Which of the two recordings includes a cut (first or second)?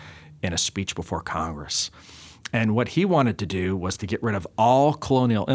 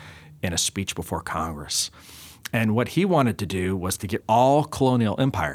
second